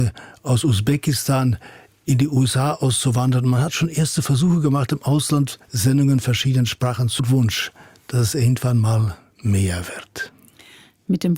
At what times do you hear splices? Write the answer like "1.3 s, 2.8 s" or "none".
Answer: 7.2 s